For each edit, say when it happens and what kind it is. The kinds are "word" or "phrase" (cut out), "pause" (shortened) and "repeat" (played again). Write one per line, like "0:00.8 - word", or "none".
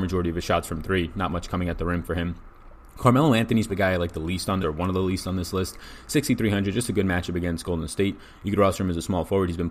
0:03.7 - word
0:04.6 - phrase